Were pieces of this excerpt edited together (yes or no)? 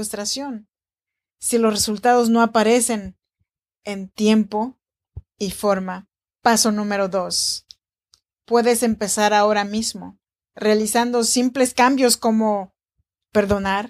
no